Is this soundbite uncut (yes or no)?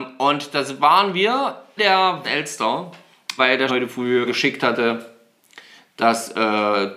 no